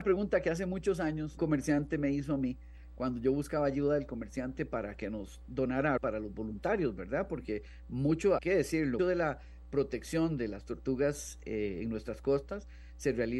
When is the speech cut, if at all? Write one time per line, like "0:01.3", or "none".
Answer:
0:01.4
0:06.0
0:08.4
0:09.0